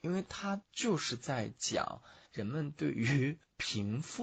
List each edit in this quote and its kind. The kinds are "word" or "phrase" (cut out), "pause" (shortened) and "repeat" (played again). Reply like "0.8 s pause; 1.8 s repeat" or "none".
2.3 s pause